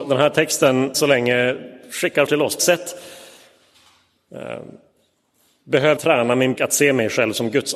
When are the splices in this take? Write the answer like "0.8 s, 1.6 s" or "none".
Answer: 0.9 s, 2.3 s, 2.6 s, 6.0 s, 6.6 s